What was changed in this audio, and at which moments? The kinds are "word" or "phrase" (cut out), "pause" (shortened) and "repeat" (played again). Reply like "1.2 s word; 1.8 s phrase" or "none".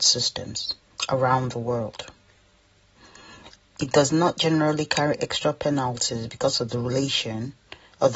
none